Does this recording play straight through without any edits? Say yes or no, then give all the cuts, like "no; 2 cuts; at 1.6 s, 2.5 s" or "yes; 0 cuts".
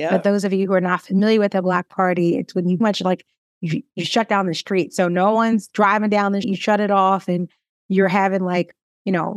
no; 2 cuts; at 2.8 s, 6.4 s